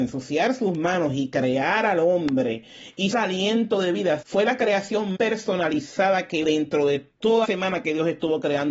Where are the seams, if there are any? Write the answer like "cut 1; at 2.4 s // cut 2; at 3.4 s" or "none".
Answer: cut 1; at 3.1 s // cut 2; at 4.2 s // cut 3; at 5.1 s // cut 4; at 6.4 s // cut 5; at 7.4 s